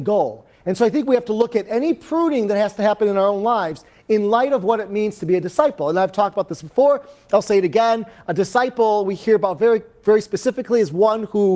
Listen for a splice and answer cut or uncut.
uncut